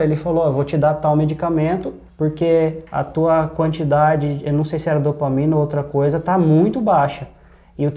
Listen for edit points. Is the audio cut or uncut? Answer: cut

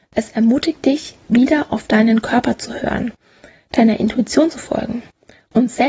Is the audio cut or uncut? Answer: uncut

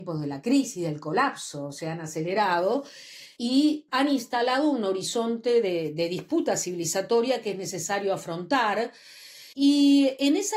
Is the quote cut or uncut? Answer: cut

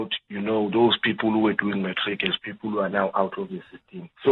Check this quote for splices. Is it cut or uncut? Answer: uncut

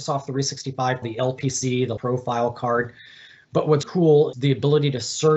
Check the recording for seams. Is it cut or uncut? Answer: cut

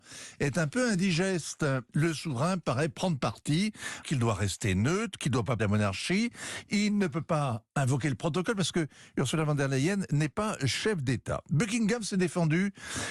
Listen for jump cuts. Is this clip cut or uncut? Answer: cut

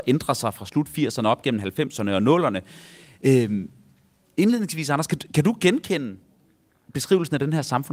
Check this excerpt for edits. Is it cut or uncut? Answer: uncut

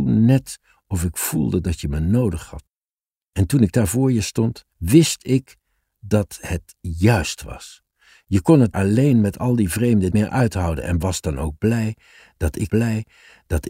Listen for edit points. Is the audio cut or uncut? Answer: cut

